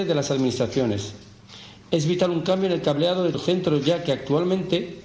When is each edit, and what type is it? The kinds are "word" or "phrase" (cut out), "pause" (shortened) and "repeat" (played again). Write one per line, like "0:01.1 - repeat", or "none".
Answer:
0:03.3 - word